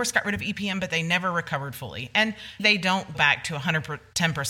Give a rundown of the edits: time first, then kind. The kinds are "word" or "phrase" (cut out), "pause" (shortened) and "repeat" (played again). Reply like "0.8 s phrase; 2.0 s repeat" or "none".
2.6 s word; 3.1 s word